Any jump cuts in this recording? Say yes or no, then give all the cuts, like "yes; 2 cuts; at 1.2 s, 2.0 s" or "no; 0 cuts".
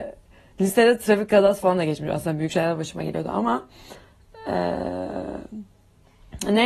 no; 0 cuts